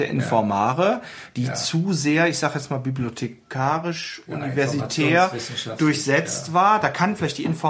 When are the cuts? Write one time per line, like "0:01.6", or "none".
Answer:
none